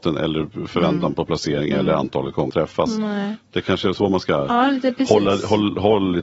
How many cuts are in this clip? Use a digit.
1